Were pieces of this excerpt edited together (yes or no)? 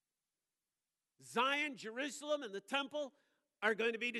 no